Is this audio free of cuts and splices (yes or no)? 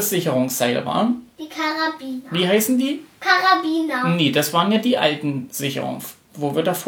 yes